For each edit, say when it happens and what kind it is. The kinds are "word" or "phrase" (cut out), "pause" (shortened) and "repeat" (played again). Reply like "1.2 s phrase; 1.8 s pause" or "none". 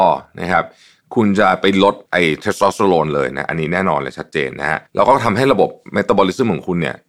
2.1 s pause; 4.9 s pause